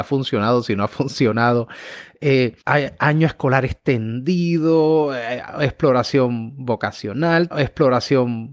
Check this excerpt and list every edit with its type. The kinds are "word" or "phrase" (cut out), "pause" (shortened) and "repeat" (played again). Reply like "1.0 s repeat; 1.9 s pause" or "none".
2.6 s pause; 7.5 s repeat